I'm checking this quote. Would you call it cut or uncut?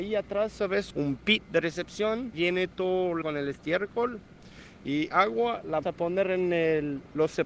cut